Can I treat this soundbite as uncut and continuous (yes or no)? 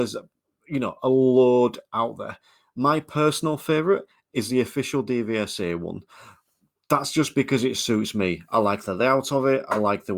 yes